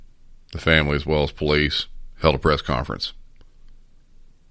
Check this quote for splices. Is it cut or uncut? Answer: uncut